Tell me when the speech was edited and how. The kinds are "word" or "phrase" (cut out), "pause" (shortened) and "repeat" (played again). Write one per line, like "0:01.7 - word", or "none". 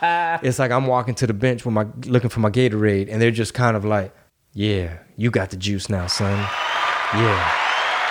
0:04.3 - pause